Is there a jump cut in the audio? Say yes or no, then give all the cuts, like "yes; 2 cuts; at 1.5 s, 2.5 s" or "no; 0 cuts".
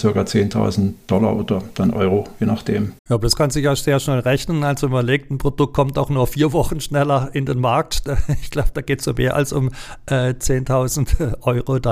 yes; 1 cut; at 3.0 s